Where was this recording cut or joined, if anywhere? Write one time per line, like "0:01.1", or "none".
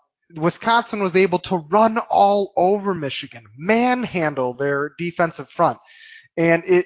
none